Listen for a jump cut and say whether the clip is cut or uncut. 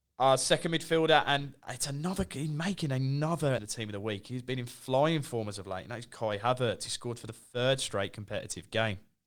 cut